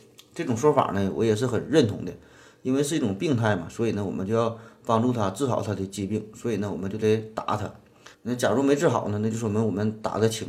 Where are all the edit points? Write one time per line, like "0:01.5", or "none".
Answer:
0:08.1